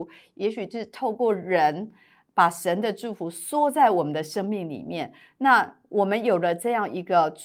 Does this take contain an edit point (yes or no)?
no